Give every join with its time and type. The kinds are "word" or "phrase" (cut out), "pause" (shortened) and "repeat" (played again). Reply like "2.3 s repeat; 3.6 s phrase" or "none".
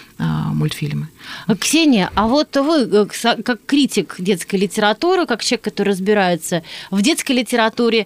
none